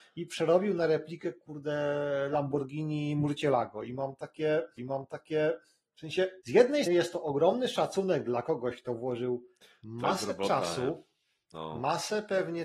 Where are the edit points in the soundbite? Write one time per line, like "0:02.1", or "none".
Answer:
0:04.8
0:06.4
0:06.9